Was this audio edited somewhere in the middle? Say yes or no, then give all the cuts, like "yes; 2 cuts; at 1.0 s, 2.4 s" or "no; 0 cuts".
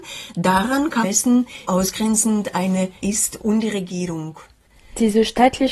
yes; 4 cuts; at 1.0 s, 1.7 s, 3.0 s, 3.4 s